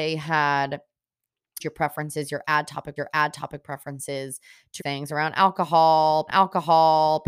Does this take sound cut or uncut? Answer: cut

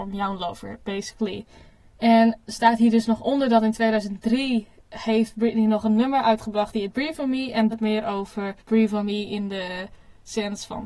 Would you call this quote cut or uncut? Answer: cut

